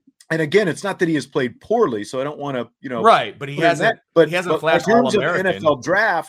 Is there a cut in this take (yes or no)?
yes